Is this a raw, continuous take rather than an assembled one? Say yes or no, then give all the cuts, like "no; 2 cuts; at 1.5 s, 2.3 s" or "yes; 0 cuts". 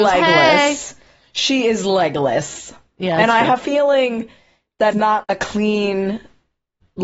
no; 3 cuts; at 3.6 s, 4.9 s, 5.2 s